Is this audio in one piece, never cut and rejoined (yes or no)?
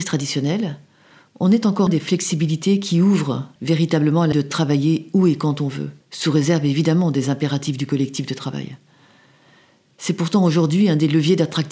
no